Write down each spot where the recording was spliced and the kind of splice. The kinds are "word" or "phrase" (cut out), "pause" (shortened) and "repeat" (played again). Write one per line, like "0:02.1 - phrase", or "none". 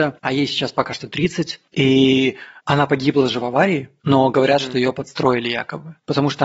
none